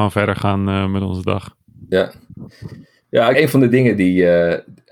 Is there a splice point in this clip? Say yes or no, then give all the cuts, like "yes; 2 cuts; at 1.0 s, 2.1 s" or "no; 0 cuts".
yes; 1 cut; at 3.3 s